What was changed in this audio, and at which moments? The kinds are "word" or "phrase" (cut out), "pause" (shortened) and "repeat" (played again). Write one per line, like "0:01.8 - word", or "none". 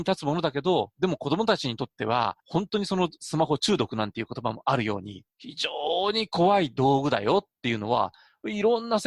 0:02.4 - pause
0:05.3 - pause